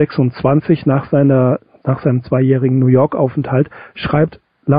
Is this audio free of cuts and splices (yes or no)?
yes